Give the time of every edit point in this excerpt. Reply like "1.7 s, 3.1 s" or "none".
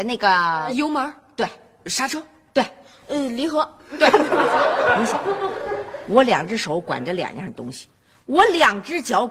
none

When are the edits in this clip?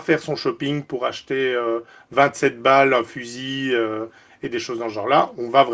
none

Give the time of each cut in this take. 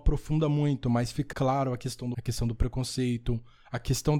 1.3 s, 2.1 s

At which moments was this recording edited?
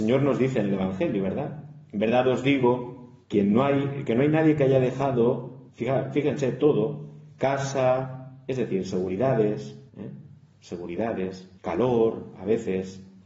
3.2 s, 5.7 s, 9.9 s, 11.6 s

